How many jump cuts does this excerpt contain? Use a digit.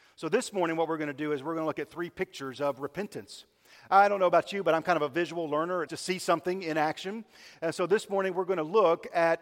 1